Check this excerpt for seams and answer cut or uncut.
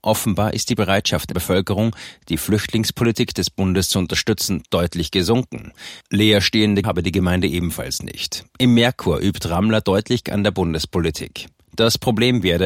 cut